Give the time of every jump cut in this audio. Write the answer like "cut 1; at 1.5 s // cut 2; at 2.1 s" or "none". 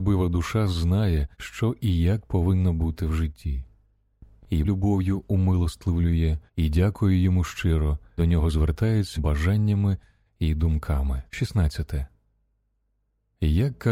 cut 1; at 1.3 s // cut 2; at 4.6 s // cut 3; at 6.5 s // cut 4; at 8.2 s // cut 5; at 9.2 s // cut 6; at 11.3 s